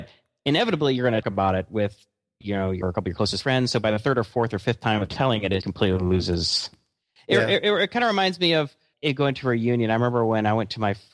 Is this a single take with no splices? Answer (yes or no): no